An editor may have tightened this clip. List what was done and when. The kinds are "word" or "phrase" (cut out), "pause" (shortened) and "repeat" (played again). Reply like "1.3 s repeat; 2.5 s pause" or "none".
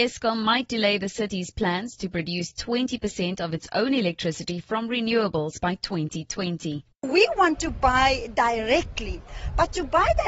6.9 s pause